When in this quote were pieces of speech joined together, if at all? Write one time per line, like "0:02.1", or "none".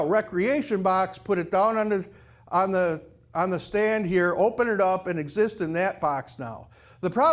none